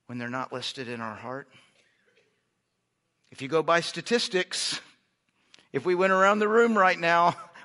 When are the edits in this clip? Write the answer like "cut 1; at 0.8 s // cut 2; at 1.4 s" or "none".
none